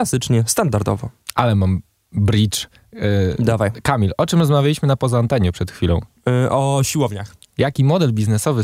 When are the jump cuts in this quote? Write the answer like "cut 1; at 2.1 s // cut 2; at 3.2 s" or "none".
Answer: none